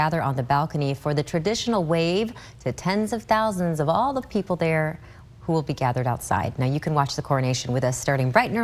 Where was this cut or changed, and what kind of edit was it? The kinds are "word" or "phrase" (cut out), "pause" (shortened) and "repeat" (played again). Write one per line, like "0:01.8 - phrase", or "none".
none